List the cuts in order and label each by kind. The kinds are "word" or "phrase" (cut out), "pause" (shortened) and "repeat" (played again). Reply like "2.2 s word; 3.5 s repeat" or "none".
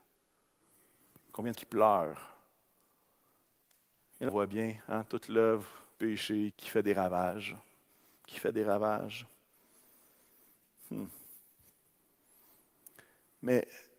1.5 s word; 4.3 s word; 6.0 s word; 6.5 s word